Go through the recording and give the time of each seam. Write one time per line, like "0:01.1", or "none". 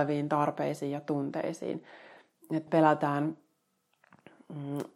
0:02.7